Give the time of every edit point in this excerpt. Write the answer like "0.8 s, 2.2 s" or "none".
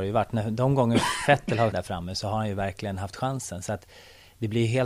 1.7 s